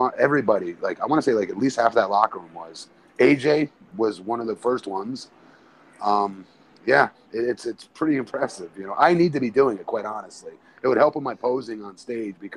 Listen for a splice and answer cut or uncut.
uncut